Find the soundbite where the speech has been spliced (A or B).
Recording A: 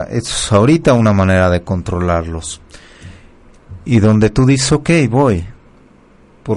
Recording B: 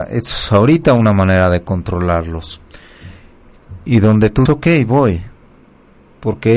B